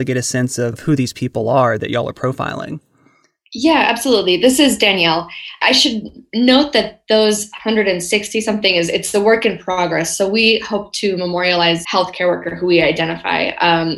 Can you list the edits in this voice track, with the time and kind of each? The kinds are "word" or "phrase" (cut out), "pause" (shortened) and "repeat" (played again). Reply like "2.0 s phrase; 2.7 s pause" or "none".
1.8 s word; 11.8 s word